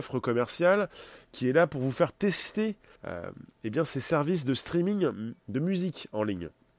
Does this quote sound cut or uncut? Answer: cut